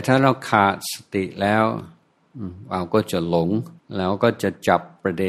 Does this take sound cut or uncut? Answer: cut